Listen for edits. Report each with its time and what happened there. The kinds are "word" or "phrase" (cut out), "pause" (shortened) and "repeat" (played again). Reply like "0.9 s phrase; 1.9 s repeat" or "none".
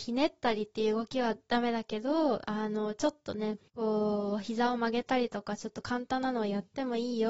3.7 s pause

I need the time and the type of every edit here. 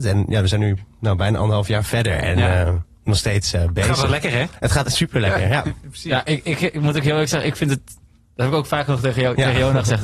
none

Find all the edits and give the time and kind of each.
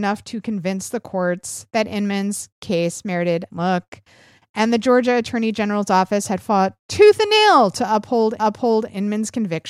3.5 s phrase; 8.4 s repeat

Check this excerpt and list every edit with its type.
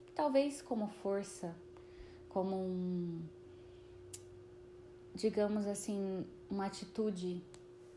none

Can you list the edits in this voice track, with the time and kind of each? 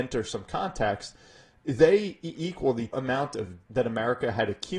2.3 s word; 2.9 s word; 3.7 s word

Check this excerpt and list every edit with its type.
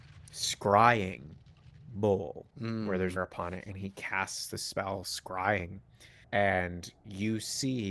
2.5 s pause; 3.2 s word; 6.2 s pause

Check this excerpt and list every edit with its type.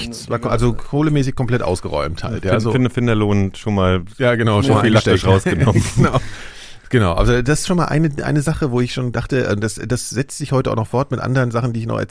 none

